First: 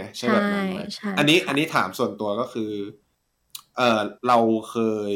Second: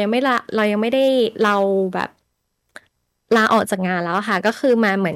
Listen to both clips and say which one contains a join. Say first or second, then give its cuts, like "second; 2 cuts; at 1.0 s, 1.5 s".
first; 1 cut; at 4.2 s